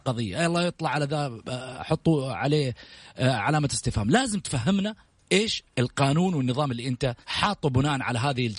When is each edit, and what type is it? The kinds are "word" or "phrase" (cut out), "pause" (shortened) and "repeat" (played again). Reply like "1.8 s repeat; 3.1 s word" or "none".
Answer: 5.7 s pause; 7.2 s pause